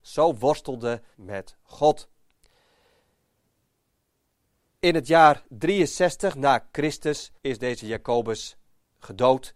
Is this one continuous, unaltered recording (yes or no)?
no